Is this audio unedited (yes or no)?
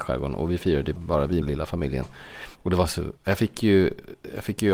no